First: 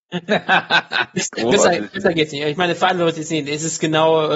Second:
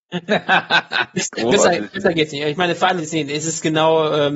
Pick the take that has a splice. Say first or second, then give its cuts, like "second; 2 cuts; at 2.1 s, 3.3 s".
second; 1 cut; at 3.0 s